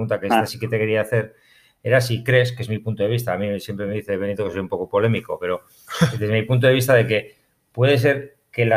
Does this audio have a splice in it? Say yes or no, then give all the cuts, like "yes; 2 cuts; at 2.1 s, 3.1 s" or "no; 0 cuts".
no; 0 cuts